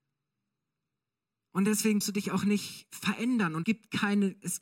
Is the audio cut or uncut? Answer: cut